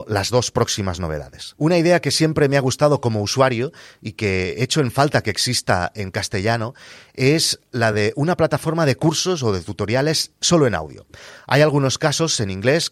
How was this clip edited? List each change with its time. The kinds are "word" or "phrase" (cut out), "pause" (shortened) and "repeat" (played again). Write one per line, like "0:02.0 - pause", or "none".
none